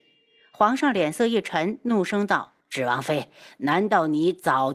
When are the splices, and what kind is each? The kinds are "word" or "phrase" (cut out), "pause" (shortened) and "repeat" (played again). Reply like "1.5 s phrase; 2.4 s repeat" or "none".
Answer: 2.6 s pause